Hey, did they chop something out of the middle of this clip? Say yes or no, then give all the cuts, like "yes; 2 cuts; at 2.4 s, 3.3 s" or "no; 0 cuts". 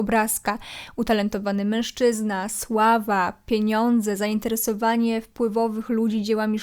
no; 0 cuts